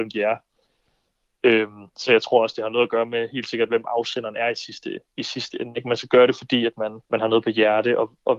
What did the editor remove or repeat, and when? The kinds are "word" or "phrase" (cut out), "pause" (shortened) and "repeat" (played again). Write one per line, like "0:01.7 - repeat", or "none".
0:01.9 - pause
0:07.0 - pause

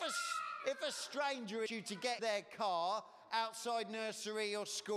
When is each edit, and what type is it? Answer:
0:01.7 - word
0:02.2 - word

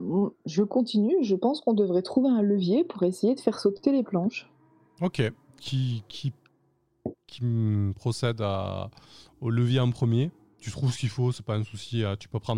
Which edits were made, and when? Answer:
none

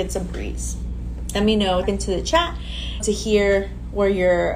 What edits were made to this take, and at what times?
0:01.8 - word
0:03.0 - phrase

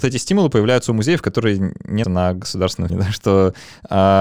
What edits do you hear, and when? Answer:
0:02.0 - word
0:02.9 - word

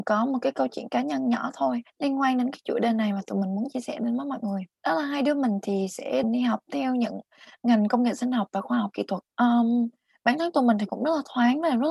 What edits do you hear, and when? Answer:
0:01.9 - pause
0:04.7 - pause
0:06.2 - word
0:09.3 - pause

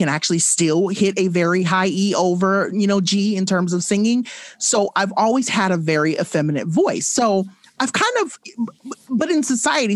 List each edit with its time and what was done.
none

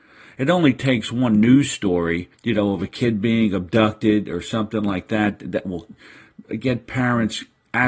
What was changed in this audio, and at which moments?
0:02.3 - pause

